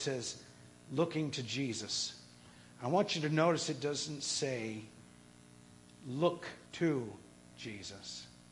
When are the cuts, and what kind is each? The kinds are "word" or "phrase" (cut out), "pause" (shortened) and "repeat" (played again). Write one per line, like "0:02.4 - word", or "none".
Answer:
0:06.7 - pause